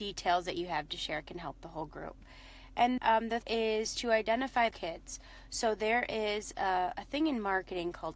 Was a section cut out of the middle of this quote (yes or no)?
yes